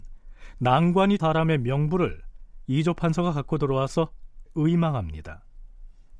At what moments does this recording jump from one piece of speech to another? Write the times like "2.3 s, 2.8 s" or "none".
1.2 s, 4.5 s